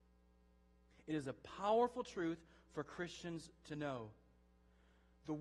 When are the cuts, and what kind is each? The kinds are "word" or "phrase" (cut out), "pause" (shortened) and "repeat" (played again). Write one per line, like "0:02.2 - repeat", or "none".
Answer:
none

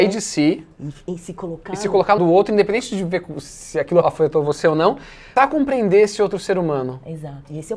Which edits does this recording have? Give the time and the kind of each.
0:02.2 - word
0:04.0 - word
0:05.4 - phrase

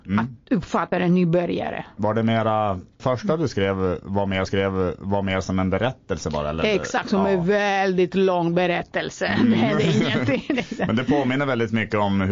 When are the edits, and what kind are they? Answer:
0:00.9 - word
0:03.0 - word
0:04.5 - repeat

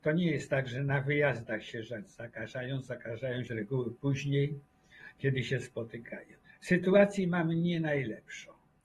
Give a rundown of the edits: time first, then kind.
0:03.5 - phrase
0:06.4 - pause

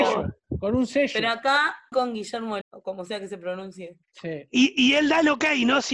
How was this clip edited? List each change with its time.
0:01.9 - word
0:02.6 - word
0:04.0 - pause

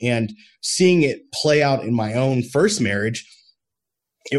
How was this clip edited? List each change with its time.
none

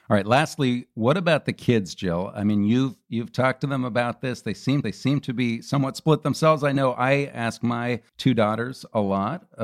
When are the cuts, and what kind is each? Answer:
0:04.8 - repeat
0:08.1 - pause

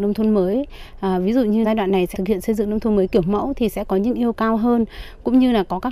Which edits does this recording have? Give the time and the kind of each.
0:01.6 - word
0:02.1 - word
0:04.3 - word

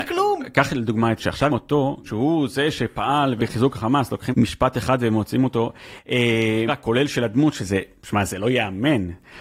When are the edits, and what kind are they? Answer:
0:01.2 - word
0:01.5 - word
0:02.1 - word
0:03.4 - word
0:04.3 - word
0:06.7 - word

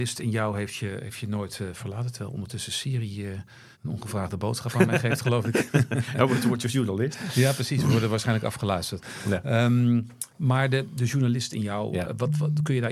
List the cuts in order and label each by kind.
0:03.7 - pause
0:10.3 - pause

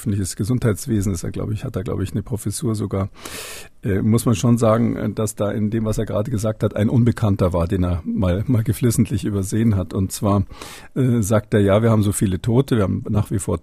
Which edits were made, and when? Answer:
none

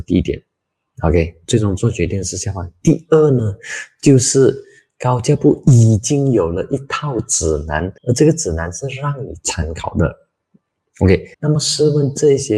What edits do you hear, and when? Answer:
0:08.0 - pause
0:11.3 - pause

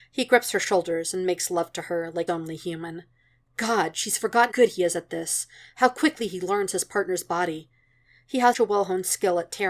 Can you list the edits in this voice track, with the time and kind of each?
0:02.3 - word
0:04.5 - word
0:08.5 - word

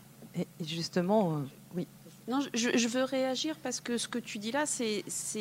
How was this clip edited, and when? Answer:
none

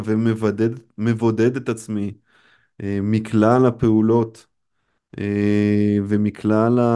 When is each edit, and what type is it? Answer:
none

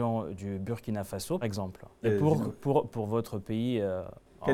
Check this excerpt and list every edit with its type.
0:01.4 - word
0:02.0 - word
0:02.9 - word

